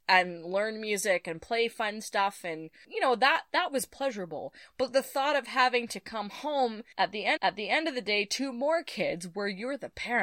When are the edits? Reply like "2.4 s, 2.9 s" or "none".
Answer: 7.4 s

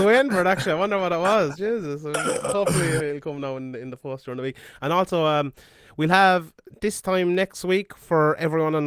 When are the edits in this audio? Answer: 3.0 s

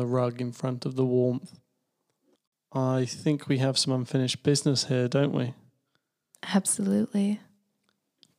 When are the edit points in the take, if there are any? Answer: none

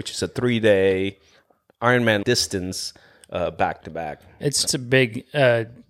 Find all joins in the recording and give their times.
2.2 s, 3.8 s, 4.7 s

